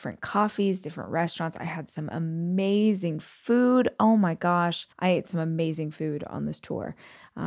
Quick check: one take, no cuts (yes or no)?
no